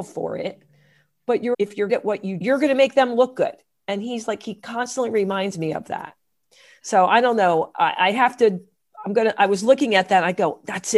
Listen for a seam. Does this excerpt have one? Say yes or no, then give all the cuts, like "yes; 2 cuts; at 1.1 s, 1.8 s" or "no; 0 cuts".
yes; 3 cuts; at 1.5 s, 1.9 s, 2.4 s